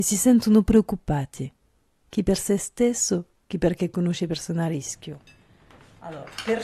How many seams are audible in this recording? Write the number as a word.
zero